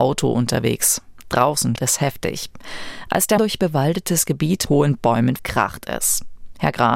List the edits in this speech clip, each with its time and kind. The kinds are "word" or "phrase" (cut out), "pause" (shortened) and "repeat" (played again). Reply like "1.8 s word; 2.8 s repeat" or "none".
1.8 s word; 3.4 s word; 4.7 s word; 5.4 s word